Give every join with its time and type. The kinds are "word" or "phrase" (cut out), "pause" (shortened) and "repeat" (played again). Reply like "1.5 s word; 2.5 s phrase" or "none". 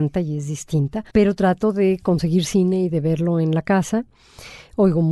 1.1 s pause